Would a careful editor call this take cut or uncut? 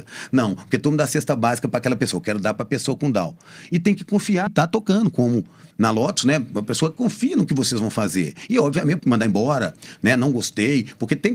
cut